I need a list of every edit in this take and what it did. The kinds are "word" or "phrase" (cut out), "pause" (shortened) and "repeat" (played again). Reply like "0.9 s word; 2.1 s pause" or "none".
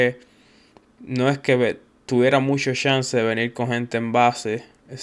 none